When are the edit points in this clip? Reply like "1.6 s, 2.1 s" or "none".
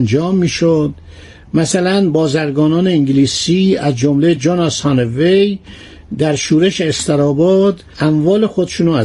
none